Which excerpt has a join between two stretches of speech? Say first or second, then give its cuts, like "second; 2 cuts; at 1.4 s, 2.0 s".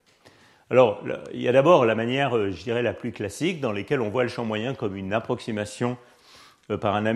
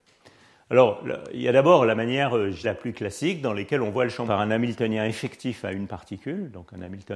second; 2 cuts; at 2.6 s, 4.3 s